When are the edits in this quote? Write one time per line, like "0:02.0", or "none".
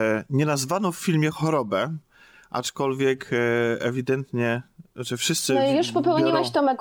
none